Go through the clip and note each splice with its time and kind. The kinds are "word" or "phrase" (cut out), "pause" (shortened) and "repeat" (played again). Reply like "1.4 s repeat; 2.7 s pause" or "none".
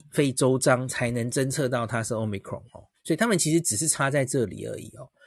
2.9 s pause